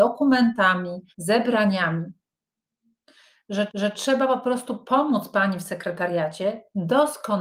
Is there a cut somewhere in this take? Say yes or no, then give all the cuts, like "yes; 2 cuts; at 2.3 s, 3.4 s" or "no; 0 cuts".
yes; 2 cuts; at 1.1 s, 3.7 s